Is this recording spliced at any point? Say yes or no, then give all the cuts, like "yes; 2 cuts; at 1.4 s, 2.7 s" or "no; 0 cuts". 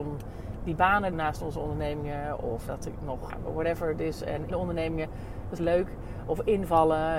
yes; 5 cuts; at 1.1 s, 2.7 s, 3.3 s, 4.5 s, 5.6 s